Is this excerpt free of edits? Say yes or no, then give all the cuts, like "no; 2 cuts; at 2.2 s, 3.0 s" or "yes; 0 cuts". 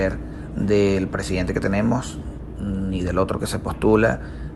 yes; 0 cuts